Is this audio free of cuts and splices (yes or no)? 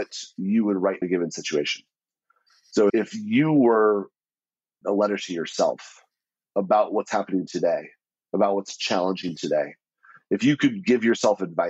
no